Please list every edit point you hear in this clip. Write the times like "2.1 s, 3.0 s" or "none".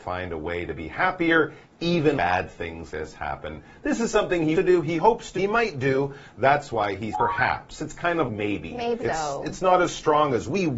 2.2 s, 2.9 s, 4.5 s, 5.4 s, 7.1 s, 8.3 s, 9.0 s

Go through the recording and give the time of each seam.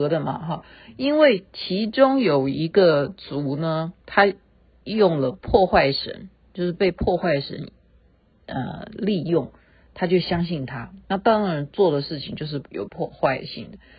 4.0 s

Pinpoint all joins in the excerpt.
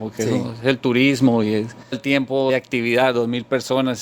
1.9 s, 2.5 s

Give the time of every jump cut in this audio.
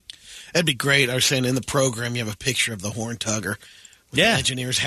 none

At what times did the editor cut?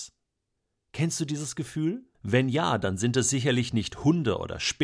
2.1 s

